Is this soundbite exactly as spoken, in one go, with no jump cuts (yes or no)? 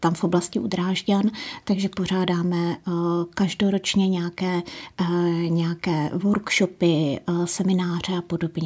yes